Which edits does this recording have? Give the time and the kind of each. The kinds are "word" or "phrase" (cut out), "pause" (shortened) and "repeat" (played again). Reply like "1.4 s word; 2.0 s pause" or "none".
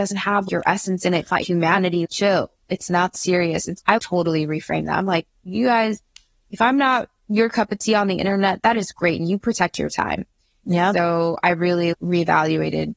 1.4 s word; 3.1 s word; 3.8 s word